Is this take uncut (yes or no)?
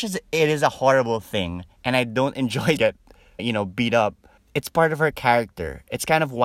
no